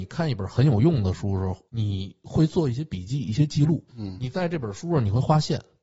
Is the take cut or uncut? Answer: cut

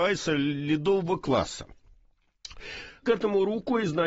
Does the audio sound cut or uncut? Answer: cut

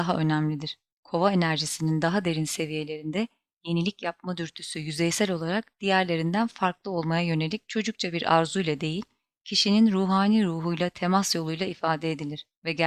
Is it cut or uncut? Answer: uncut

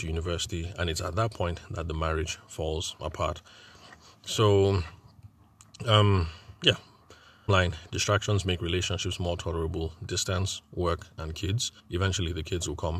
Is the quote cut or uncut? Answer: cut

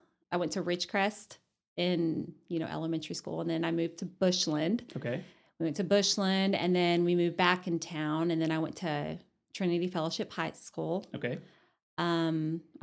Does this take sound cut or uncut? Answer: uncut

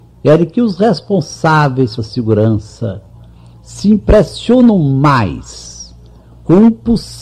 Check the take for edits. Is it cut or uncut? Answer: cut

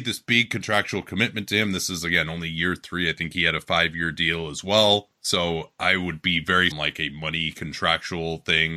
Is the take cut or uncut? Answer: cut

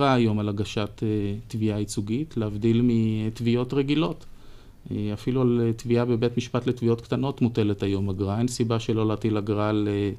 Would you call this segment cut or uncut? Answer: uncut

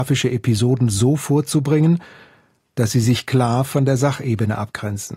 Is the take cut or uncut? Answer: uncut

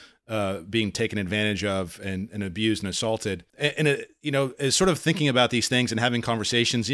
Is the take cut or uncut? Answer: cut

